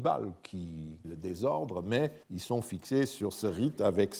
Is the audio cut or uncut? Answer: cut